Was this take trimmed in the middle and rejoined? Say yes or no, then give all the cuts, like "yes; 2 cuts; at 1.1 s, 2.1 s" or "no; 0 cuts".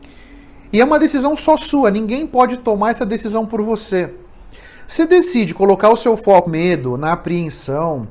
yes; 2 cuts; at 5.0 s, 6.5 s